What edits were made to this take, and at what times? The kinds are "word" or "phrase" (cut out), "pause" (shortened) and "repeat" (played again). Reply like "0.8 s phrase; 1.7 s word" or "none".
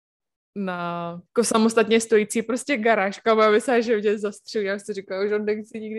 1.3 s pause